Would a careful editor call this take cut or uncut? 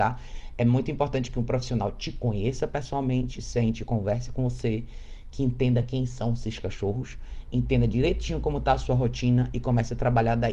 uncut